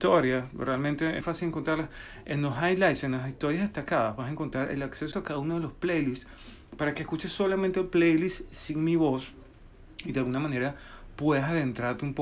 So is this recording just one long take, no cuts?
no; 2 cuts; at 1.2 s, 5.1 s

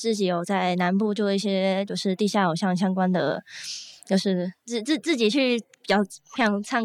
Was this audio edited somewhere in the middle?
no; 0 cuts

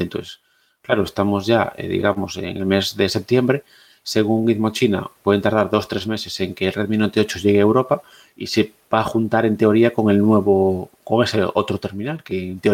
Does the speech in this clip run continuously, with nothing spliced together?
yes; 0 cuts

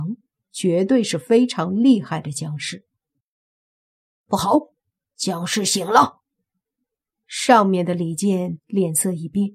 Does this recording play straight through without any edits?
yes; 0 cuts

